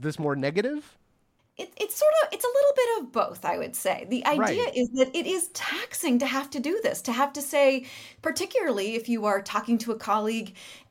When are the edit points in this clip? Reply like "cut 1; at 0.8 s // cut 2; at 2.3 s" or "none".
none